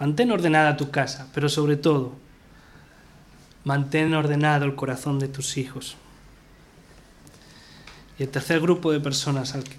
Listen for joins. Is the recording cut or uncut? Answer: uncut